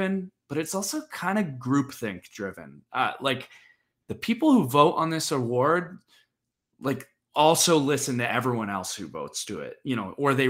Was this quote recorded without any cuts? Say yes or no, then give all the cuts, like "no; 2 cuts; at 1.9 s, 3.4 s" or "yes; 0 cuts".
yes; 0 cuts